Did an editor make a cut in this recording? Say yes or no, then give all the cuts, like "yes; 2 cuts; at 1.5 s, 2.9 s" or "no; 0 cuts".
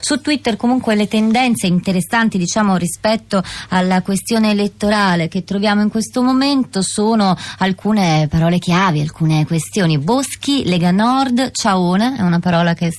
no; 0 cuts